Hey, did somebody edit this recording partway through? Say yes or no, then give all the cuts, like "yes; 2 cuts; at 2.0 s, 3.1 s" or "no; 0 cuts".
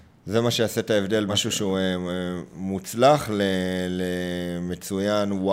yes; 1 cut; at 1.3 s